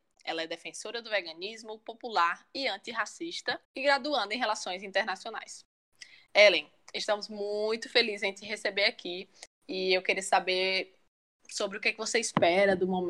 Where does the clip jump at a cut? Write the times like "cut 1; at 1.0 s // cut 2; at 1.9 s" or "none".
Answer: cut 1; at 3.6 s